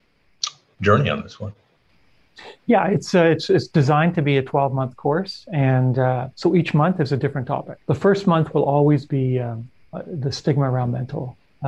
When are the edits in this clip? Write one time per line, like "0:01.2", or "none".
0:06.3
0:07.8